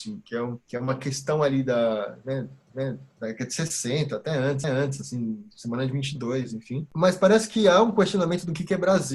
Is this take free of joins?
no; 2 cuts; at 2.7 s, 4.6 s

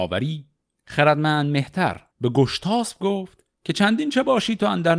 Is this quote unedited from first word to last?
no; 2 cuts; at 2.1 s, 3.5 s

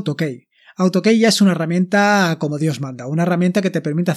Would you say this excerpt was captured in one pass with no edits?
yes; 0 cuts

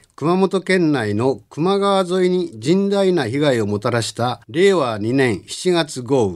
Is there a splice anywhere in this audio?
yes; 1 cut; at 4.4 s

